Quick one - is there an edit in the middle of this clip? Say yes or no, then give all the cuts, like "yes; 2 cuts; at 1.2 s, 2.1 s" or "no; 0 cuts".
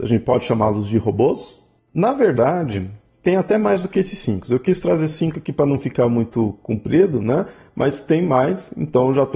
no; 0 cuts